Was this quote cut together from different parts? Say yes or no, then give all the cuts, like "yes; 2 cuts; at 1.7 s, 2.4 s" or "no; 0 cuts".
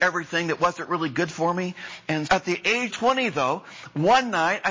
yes; 2 cuts; at 2.3 s, 2.9 s